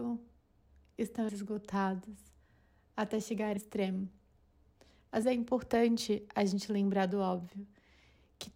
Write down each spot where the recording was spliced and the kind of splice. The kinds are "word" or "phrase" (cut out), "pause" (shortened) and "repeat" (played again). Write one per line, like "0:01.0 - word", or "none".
0:01.3 - word
0:03.6 - word
0:05.2 - word